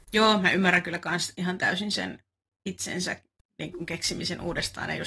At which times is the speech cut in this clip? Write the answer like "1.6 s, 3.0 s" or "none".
none

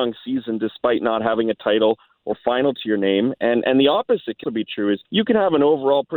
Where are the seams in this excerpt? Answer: 2.3 s, 4.4 s, 5.0 s

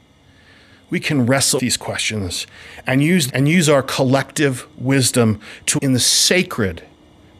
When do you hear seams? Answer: 1.6 s, 3.3 s, 5.8 s

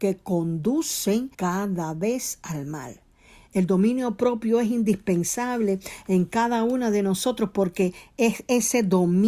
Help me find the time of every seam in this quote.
1.3 s

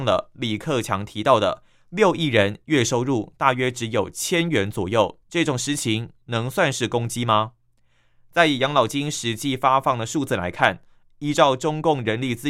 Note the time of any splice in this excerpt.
5.2 s

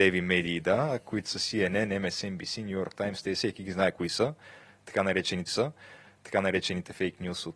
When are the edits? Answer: 5.5 s

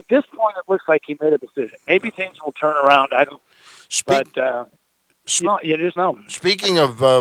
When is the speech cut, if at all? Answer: 1.4 s, 3.3 s, 5.4 s, 6.0 s

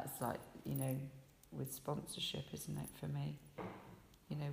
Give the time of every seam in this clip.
none

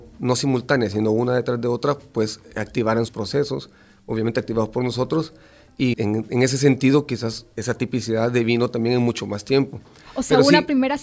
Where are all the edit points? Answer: 3.1 s, 5.9 s, 7.5 s

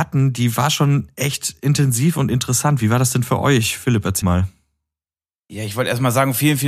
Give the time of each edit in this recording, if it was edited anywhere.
4.2 s

